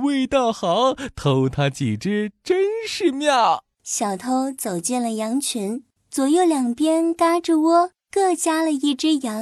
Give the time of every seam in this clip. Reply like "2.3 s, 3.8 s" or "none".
3.7 s, 6.0 s, 8.0 s